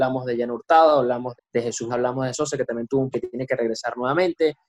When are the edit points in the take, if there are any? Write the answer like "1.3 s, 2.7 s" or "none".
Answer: 1.4 s, 1.9 s, 2.3 s, 3.1 s